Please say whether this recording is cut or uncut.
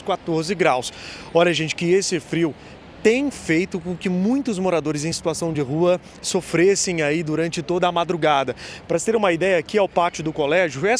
uncut